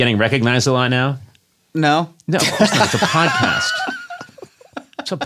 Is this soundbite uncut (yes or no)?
yes